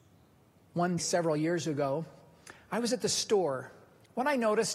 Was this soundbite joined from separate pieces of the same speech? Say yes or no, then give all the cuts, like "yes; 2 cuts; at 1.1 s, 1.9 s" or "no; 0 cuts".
yes; 1 cut; at 1.0 s